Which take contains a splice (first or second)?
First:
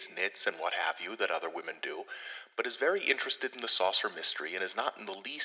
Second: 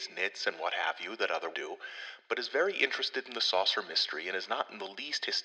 second